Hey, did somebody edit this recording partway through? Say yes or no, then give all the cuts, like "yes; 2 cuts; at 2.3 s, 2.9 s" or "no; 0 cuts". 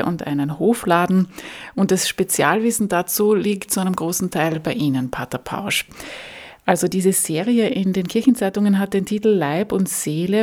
no; 0 cuts